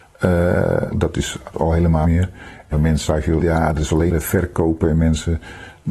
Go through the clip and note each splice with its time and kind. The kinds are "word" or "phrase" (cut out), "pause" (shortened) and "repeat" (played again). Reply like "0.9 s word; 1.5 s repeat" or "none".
0.9 s word; 1.5 s word; 2.0 s word; 2.7 s word; 3.1 s word; 3.4 s word; 4.1 s word